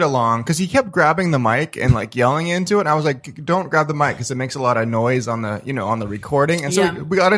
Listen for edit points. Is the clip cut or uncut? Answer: uncut